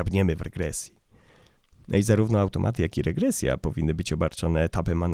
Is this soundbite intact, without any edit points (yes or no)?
yes